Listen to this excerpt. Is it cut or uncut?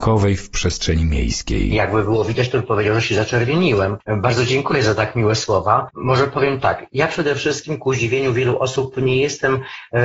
uncut